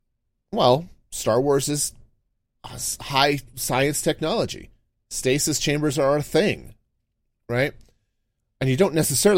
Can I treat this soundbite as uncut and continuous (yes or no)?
no